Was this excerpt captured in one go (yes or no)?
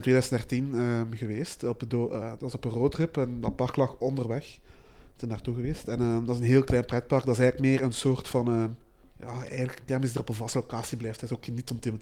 yes